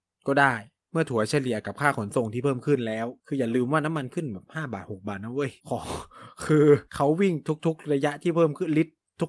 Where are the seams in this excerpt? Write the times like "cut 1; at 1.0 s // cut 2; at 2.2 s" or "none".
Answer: cut 1; at 3.2 s // cut 2; at 5.6 s // cut 3; at 6.9 s